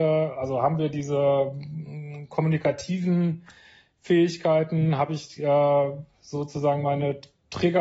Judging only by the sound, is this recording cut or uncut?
uncut